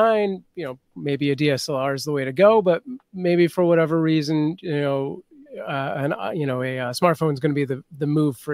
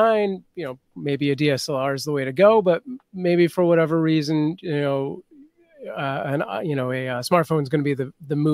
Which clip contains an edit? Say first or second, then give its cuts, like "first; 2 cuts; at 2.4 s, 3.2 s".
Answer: first; 1 cut; at 5.5 s